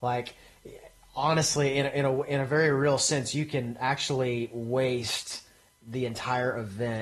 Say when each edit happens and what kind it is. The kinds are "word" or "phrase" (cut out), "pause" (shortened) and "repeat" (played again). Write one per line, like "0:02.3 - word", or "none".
none